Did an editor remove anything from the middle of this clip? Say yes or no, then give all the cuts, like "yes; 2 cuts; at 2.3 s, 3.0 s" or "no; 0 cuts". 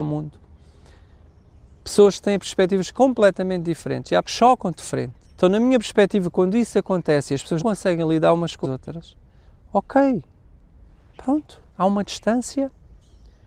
yes; 5 cuts; at 4.2 s, 5.2 s, 7.6 s, 8.6 s, 11.7 s